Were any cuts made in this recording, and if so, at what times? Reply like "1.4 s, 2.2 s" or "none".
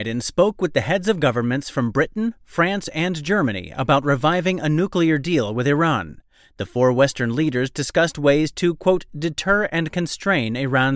none